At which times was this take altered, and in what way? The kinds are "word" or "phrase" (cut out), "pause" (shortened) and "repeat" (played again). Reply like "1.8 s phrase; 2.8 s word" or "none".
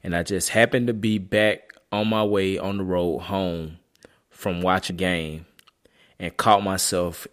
4.9 s word